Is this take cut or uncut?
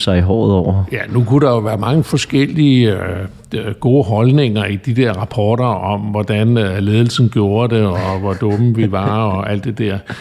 uncut